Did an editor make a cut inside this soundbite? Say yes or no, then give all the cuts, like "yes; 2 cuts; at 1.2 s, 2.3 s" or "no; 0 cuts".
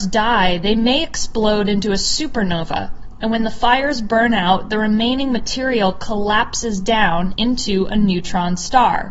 no; 0 cuts